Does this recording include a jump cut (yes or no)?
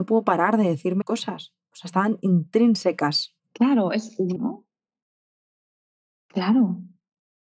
yes